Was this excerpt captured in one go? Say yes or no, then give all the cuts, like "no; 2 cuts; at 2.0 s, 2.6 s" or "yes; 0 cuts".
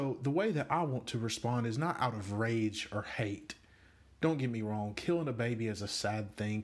yes; 0 cuts